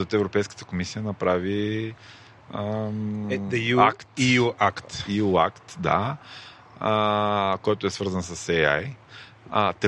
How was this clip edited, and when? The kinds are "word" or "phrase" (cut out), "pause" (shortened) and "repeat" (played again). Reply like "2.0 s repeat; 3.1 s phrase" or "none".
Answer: none